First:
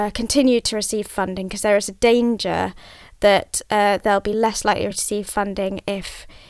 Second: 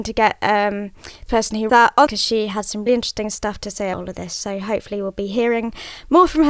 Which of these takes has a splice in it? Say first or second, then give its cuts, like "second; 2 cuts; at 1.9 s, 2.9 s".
second; 5 cuts; at 1.3 s, 1.7 s, 2.1 s, 2.9 s, 3.9 s